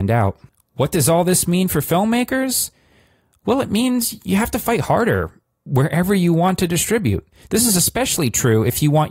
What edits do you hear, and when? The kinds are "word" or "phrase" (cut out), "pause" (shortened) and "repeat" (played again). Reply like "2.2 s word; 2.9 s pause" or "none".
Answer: none